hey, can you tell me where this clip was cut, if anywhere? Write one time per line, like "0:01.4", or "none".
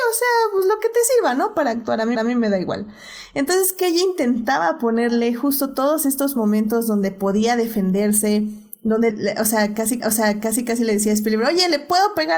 0:02.1
0:09.1
0:10.0